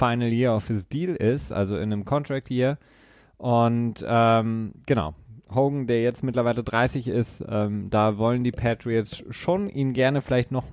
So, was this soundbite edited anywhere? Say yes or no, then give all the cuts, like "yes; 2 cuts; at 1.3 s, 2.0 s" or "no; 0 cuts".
no; 0 cuts